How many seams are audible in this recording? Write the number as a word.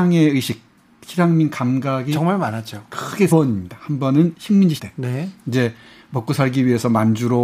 two